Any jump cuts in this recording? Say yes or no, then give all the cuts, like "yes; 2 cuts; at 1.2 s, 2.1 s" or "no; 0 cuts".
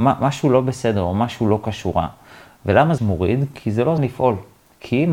yes; 2 cuts; at 3.0 s, 4.0 s